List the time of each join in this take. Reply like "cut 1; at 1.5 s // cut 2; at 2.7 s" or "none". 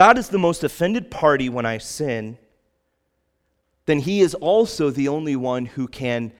none